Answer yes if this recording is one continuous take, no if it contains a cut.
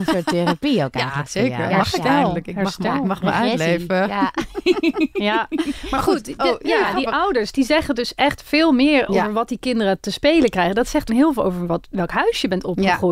no